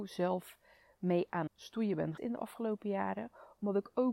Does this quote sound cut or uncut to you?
cut